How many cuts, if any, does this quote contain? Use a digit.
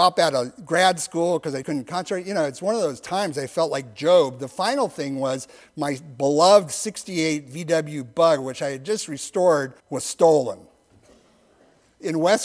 2